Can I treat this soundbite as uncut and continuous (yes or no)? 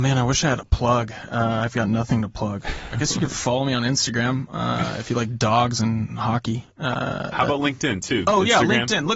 yes